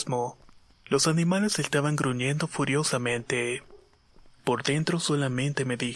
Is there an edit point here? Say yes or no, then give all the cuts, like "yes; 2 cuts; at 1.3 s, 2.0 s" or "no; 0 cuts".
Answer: no; 0 cuts